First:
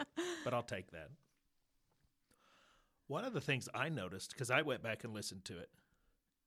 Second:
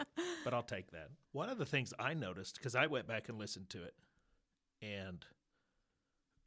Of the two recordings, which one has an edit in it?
second; 1 cut; at 1.2 s

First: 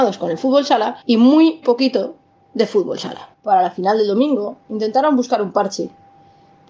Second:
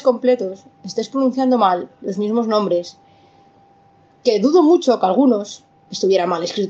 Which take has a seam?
first; 3 cuts; at 1.0 s, 1.6 s, 3.3 s

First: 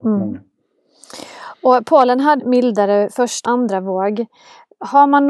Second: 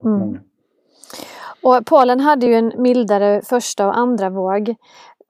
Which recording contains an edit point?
first; 2 cuts; at 2.4 s, 3.5 s

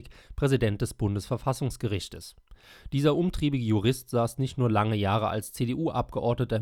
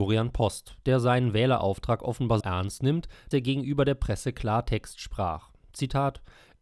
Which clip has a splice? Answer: second; 2 cuts; at 2.4 s, 3.3 s

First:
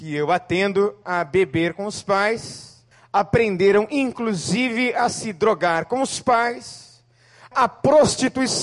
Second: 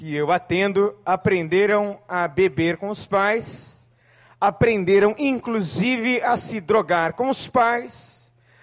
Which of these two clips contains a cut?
first; 3 cuts; at 1.0 s, 2.9 s, 7.5 s

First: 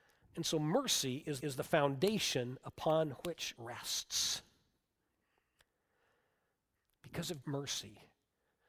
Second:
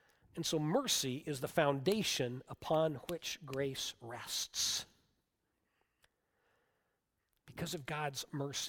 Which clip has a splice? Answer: first; 3 cuts; at 1.4 s, 3.5 s, 7.4 s

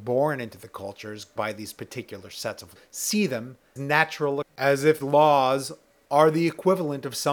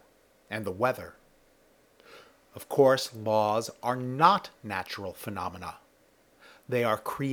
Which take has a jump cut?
first; 5 cuts; at 1.4 s, 2.8 s, 3.8 s, 4.4 s, 5.0 s

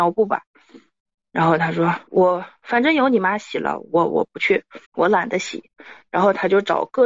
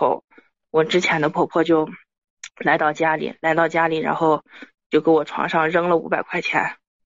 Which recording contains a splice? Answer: first; 2 cuts; at 2.1 s, 4.8 s

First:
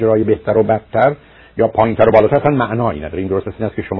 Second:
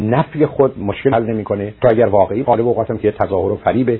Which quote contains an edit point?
second; 3 cuts; at 1.1 s, 1.8 s, 2.4 s

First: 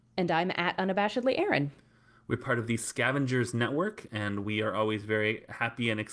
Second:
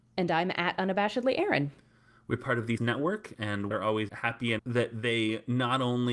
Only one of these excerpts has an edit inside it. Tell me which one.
second; 4 cuts; at 2.8 s, 3.7 s, 4.1 s, 4.6 s

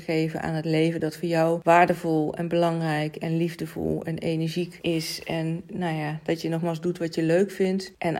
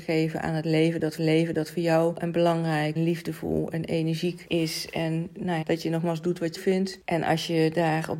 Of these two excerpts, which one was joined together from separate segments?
second; 5 cuts; at 1.2 s, 2.2 s, 3.0 s, 5.6 s, 6.6 s

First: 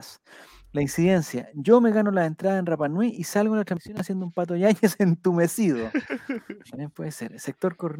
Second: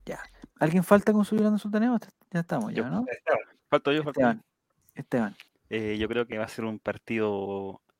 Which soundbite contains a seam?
second; 1 cut; at 5.5 s

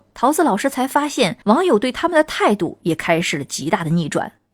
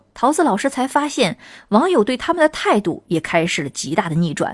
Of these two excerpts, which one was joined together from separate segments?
first; 1 cut; at 1.4 s

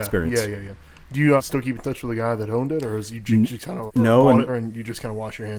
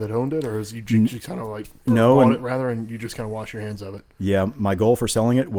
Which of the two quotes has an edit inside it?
first; 3 cuts; at 1.4 s, 3.9 s, 4.5 s

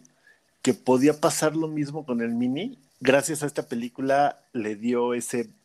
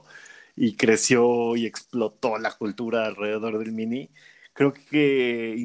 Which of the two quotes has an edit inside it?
first; 1 cut; at 2.9 s

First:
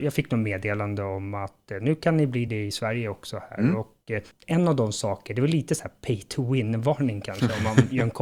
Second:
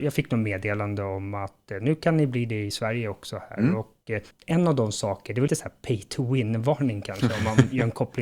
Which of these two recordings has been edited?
second; 1 cut; at 5.5 s

